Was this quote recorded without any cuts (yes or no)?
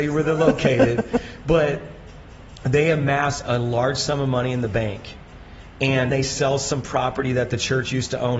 no